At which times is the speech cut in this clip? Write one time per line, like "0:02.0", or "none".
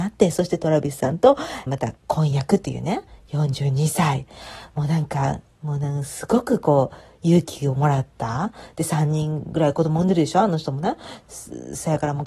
0:01.7
0:02.0